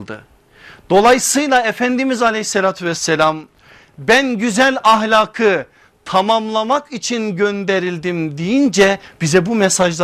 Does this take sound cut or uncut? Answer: uncut